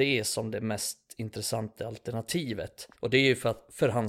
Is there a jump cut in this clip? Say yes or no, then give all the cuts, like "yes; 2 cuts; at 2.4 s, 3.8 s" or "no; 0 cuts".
yes; 1 cut; at 2.9 s